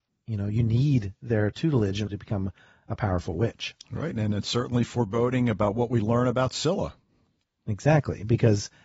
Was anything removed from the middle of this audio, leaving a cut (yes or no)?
yes